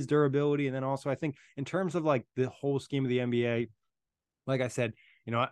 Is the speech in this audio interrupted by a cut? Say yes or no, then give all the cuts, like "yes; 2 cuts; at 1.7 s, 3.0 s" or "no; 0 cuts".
no; 0 cuts